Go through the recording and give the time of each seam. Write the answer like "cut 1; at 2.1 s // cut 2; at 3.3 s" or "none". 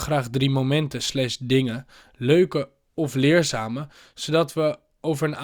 none